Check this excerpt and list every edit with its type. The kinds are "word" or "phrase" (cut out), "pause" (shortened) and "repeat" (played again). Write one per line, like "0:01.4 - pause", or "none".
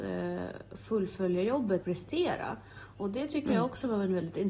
0:01.8 - word